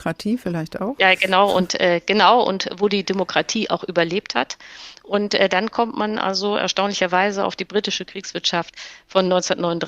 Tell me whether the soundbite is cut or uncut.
uncut